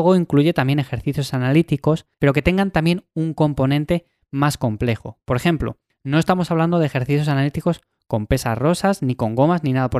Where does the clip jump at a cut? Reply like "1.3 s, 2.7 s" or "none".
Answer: 2.1 s